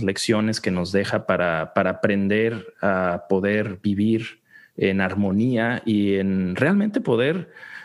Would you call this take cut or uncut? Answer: uncut